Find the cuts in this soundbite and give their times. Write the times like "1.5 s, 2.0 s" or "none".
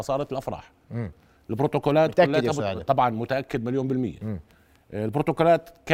none